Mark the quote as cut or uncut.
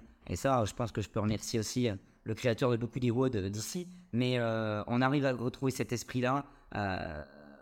uncut